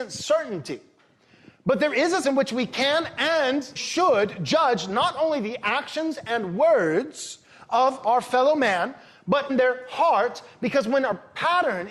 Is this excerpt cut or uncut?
cut